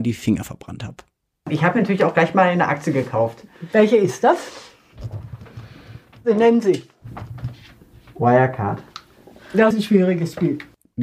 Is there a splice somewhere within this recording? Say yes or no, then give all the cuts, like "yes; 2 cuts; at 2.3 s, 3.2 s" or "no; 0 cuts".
yes; 1 cut; at 9.7 s